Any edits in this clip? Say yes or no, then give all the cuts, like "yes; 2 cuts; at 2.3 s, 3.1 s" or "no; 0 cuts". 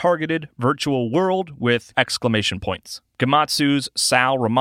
yes; 1 cut; at 1.9 s